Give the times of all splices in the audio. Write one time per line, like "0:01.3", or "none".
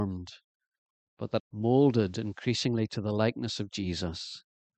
0:01.4